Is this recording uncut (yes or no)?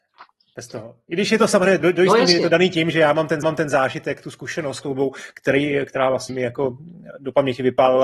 no